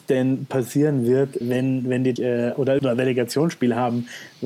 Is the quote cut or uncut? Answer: cut